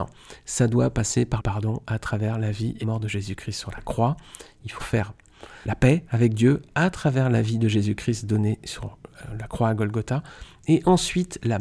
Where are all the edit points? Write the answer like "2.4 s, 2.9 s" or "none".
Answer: 1.4 s, 2.8 s, 4.8 s, 5.6 s